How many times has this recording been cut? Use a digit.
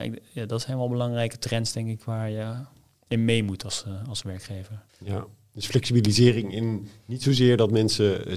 1